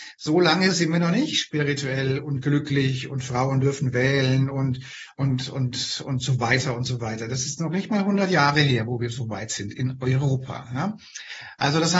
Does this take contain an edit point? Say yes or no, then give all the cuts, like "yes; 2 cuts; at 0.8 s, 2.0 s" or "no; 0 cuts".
no; 0 cuts